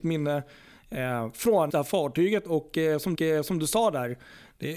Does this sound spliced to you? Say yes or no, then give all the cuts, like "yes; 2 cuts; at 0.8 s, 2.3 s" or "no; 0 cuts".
yes; 2 cuts; at 1.7 s, 3.1 s